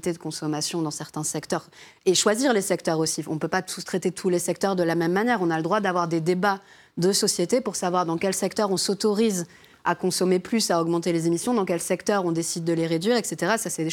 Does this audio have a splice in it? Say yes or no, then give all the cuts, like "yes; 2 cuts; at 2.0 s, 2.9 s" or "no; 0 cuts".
no; 0 cuts